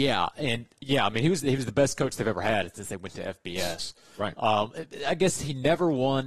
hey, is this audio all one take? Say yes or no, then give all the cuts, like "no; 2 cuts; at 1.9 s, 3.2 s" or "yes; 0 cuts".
yes; 0 cuts